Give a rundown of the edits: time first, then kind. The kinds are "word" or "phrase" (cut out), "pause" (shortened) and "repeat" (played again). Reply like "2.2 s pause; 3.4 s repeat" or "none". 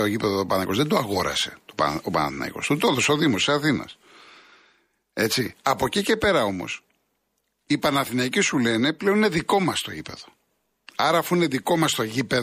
none